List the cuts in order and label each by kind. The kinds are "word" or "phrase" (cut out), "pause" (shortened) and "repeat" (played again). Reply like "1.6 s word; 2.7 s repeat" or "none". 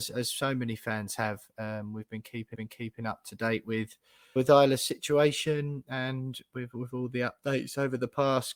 2.5 s repeat; 4.4 s word